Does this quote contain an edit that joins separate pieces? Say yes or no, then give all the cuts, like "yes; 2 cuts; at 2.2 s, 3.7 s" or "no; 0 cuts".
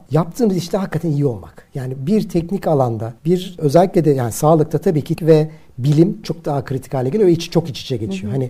yes; 3 cuts; at 3.2 s, 5.2 s, 6.2 s